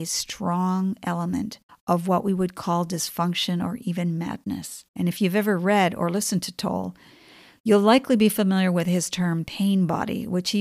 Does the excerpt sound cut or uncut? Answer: cut